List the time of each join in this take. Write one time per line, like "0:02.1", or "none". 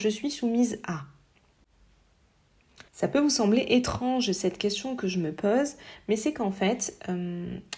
0:02.9